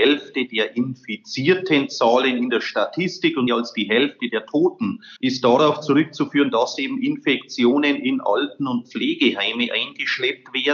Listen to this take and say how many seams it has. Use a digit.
2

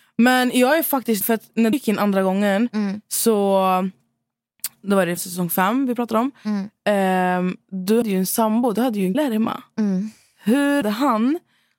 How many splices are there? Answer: 6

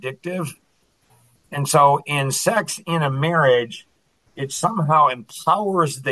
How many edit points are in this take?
0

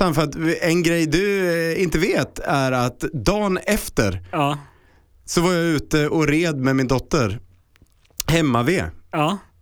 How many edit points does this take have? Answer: 0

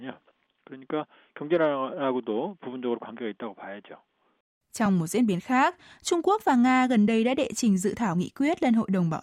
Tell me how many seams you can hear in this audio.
0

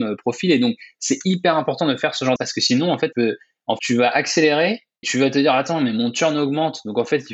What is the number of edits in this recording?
4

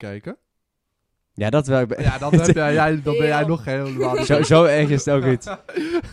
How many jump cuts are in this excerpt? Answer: 0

